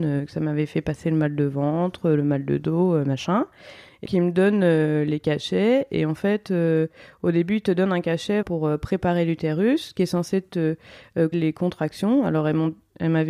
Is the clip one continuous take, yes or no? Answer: no